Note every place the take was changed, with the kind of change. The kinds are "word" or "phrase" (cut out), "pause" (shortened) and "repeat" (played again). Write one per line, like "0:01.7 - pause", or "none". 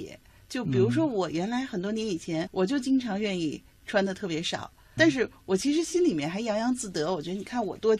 0:02.5 - word
0:05.0 - word